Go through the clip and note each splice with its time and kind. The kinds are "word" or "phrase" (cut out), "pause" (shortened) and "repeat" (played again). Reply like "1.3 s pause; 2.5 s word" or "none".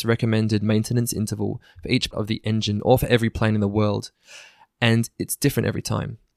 2.1 s word